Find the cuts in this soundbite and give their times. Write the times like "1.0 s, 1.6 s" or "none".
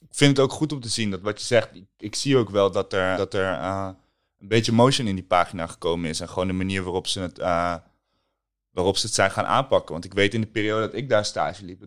3.2 s

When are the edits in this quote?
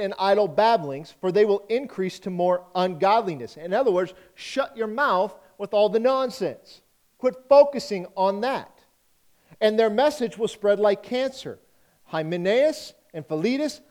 none

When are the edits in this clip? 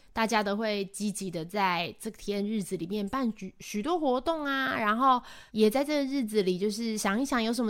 5.5 s

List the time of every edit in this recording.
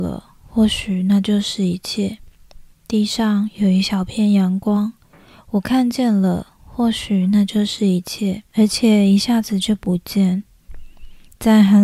2.7 s, 8.5 s

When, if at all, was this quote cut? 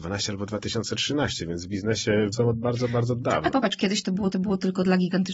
2.3 s, 3.5 s, 4.3 s

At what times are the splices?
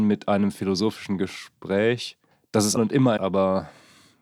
2.3 s, 2.8 s, 3.2 s

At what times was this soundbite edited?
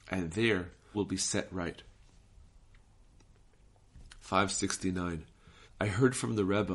0.9 s, 5.7 s

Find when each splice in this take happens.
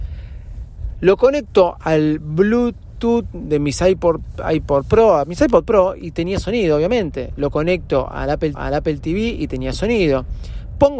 8.5 s

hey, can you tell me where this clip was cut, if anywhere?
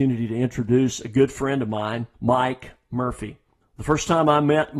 2.1 s, 3.6 s

